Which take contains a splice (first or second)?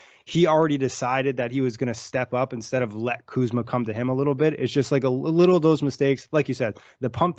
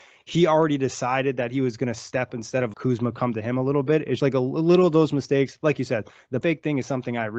second